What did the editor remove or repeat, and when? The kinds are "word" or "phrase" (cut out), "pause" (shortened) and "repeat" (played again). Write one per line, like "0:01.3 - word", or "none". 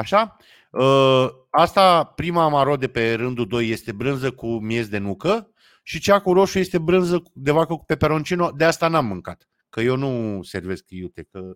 none